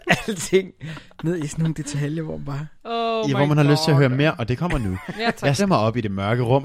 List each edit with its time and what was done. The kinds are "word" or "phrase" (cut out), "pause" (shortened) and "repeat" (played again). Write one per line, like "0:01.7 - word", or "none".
0:05.6 - word